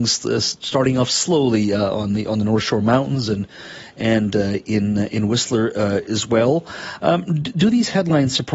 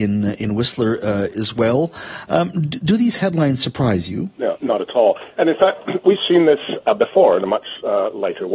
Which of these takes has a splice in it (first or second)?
second